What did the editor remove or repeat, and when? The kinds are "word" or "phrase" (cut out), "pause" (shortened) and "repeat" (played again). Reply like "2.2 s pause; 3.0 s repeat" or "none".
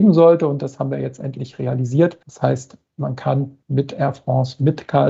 2.2 s pause; 3.6 s pause